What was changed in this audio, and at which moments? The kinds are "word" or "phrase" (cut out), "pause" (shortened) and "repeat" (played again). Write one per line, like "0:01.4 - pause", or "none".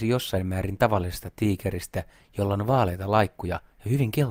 none